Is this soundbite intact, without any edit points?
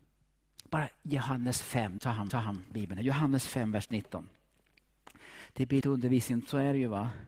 no; 4 cuts; at 0.9 s, 2.0 s, 2.3 s, 5.8 s

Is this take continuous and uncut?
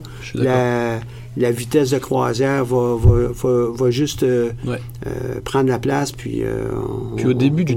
yes; 0 cuts

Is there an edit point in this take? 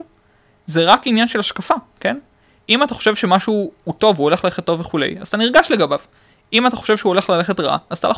no; 0 cuts

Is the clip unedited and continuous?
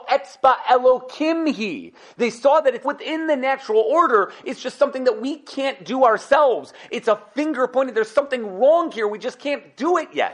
no; 1 cut; at 2.8 s

